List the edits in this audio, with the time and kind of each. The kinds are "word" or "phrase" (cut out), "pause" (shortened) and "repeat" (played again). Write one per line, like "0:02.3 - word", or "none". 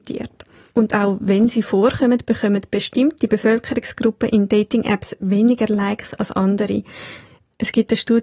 none